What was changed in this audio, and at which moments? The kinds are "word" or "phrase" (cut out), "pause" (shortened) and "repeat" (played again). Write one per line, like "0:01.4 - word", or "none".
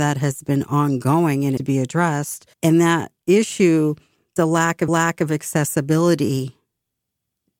0:01.6 - phrase
0:02.5 - pause
0:04.4 - word
0:04.9 - repeat